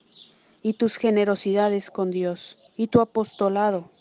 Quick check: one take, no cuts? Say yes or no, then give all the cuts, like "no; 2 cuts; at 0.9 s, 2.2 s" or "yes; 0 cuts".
no; 1 cut; at 2.7 s